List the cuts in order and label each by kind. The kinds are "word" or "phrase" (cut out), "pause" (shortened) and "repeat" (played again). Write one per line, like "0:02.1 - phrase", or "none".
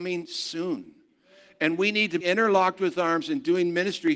0:02.2 - word